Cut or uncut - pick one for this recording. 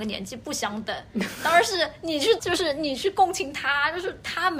cut